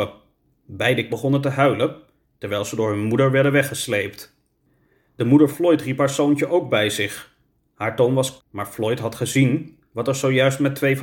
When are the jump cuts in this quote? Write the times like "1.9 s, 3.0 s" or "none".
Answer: 1.1 s, 5.5 s, 8.4 s